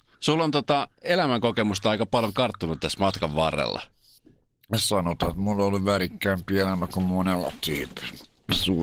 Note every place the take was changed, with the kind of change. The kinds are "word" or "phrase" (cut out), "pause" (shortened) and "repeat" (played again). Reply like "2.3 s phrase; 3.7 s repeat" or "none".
none